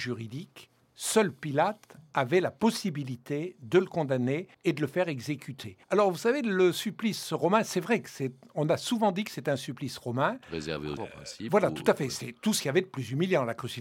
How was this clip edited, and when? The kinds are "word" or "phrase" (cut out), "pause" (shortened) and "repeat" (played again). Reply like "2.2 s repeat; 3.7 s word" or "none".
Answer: 4.5 s pause; 5.8 s pause; 11.0 s word